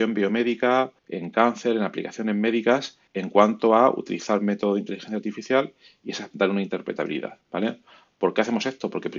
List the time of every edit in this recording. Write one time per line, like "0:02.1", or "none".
0:01.0
0:03.1
0:06.3
0:07.4